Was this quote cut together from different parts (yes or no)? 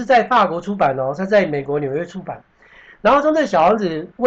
no